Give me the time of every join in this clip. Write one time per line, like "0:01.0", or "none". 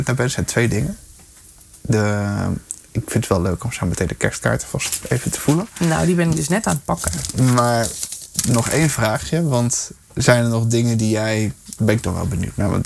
0:10.0